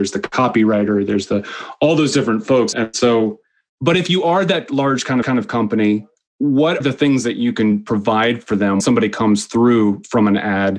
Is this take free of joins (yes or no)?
no